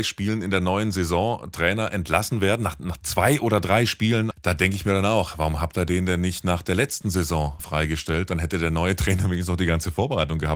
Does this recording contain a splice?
yes; 2 cuts; at 4.3 s, 7.6 s

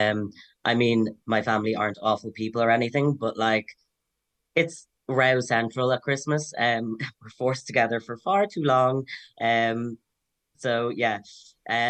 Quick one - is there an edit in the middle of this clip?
no; 0 cuts

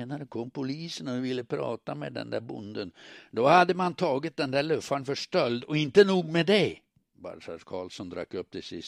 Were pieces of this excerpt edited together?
yes; 1 cut; at 7.0 s

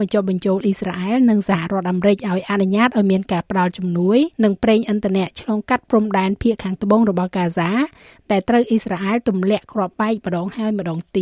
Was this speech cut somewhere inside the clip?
yes; 1 cut; at 4.3 s

